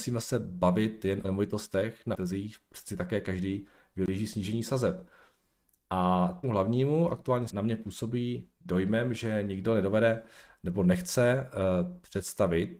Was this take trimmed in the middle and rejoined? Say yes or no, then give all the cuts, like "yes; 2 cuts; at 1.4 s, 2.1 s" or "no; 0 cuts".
yes; 4 cuts; at 1.2 s, 2.1 s, 6.4 s, 7.5 s